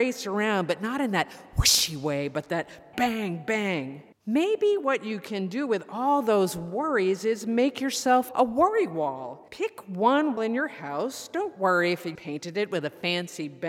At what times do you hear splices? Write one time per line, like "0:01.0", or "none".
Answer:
0:02.9
0:04.1
0:08.3
0:09.5
0:10.4
0:12.2